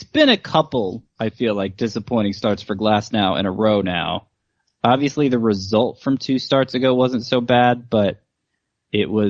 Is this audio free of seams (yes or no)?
yes